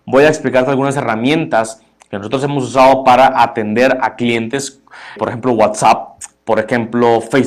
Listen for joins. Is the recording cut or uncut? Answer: cut